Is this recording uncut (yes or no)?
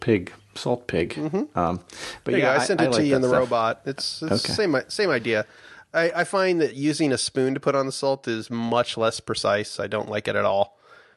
yes